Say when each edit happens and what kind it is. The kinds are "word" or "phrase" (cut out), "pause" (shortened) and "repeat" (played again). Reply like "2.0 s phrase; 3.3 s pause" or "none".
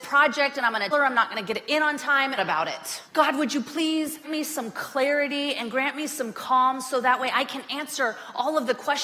0.9 s word; 2.4 s phrase; 3.0 s pause; 4.2 s word